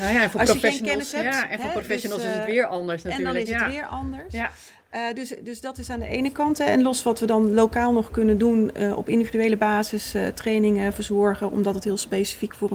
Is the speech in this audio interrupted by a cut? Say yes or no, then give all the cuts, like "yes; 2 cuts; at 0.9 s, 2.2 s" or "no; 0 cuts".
no; 0 cuts